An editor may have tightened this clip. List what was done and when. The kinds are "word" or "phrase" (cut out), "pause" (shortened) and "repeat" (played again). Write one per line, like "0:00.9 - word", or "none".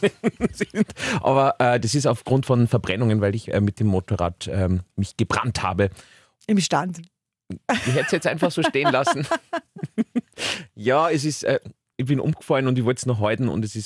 0:04.9 - pause